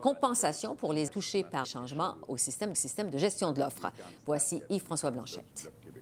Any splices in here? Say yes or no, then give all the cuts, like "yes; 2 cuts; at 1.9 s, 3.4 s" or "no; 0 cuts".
yes; 3 cuts; at 1.1 s, 1.6 s, 2.7 s